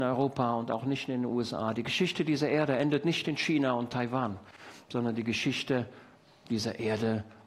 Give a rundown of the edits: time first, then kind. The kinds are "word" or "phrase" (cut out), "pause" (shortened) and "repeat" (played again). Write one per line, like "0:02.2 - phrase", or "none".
none